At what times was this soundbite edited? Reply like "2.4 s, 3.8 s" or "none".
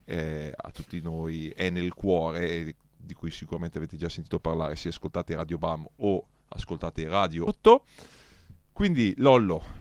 none